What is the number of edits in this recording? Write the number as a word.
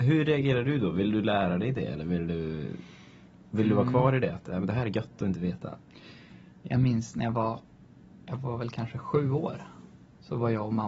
one